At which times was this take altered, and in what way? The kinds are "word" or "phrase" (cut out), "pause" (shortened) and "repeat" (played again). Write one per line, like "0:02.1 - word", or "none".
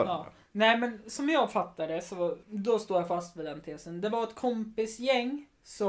0:02.4 - pause